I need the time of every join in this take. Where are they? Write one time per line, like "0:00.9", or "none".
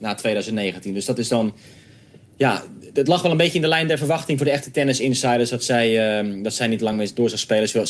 none